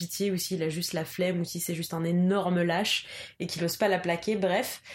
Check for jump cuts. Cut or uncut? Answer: uncut